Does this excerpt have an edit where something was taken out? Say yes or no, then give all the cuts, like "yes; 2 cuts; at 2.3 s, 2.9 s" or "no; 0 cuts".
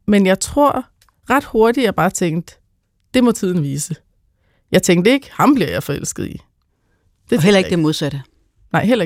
no; 0 cuts